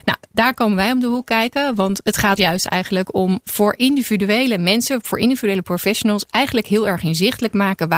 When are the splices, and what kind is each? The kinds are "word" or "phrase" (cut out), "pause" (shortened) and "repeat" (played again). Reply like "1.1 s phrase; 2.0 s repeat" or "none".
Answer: 2.4 s word; 3.4 s word